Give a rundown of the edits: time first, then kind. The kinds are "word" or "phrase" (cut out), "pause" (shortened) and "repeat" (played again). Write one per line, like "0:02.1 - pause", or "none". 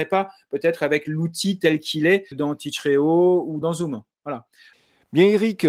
0:02.3 - word
0:03.6 - word